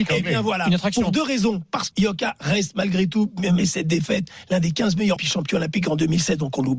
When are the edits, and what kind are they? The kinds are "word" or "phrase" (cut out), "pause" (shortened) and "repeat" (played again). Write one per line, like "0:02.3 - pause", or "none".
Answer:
0:01.9 - word
0:03.6 - word
0:05.2 - word